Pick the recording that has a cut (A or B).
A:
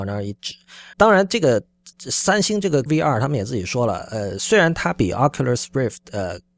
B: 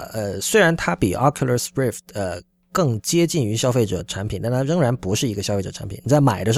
A